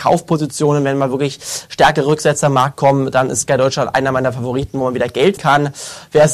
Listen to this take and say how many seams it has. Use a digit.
1